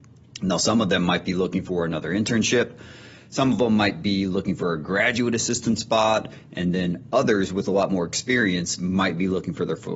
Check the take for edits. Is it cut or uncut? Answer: uncut